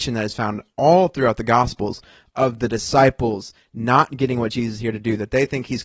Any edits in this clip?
no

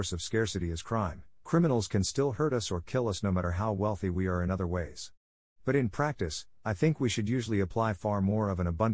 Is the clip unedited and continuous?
yes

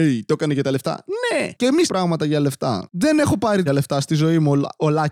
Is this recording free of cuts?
no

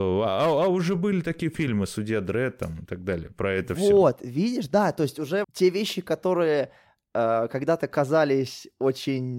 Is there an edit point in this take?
yes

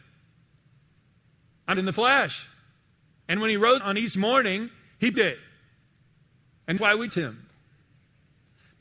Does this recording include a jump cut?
yes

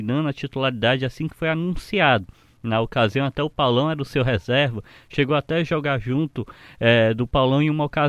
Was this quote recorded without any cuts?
yes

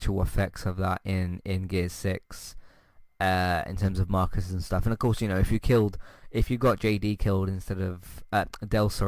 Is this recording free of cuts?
yes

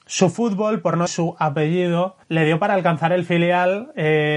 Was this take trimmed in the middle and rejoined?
yes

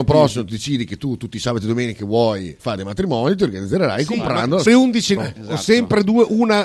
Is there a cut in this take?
yes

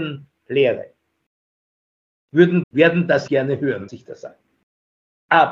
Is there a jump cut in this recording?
yes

